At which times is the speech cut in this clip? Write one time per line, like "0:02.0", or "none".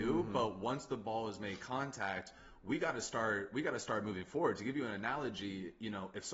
none